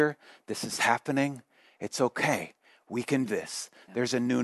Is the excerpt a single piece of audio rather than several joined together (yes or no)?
no